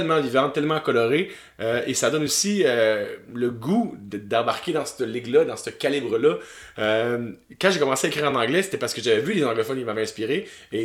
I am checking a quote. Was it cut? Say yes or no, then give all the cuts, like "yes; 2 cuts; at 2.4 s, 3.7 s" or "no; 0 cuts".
no; 0 cuts